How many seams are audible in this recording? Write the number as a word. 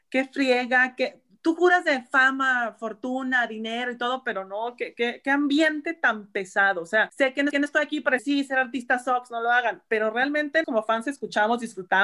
three